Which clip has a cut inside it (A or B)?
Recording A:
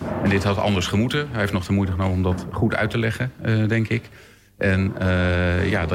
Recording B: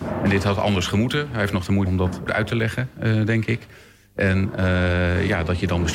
B